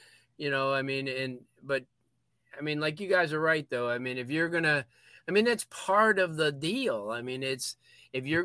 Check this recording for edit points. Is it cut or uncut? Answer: uncut